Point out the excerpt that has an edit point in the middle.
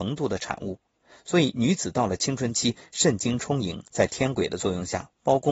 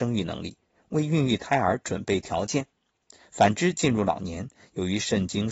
first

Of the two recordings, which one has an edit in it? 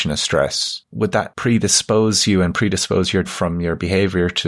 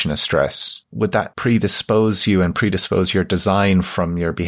first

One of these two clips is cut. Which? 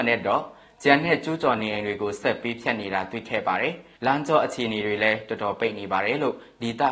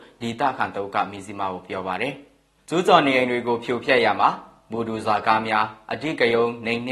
first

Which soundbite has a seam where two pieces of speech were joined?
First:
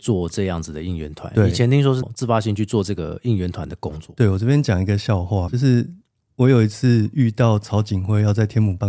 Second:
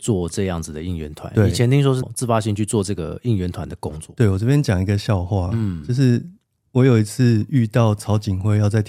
first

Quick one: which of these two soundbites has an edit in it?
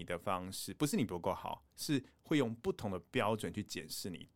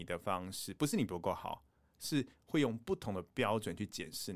first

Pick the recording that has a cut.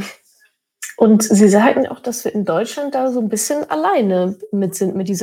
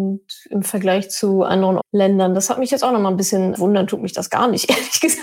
second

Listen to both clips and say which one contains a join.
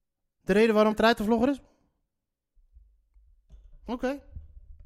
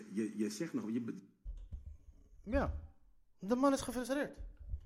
first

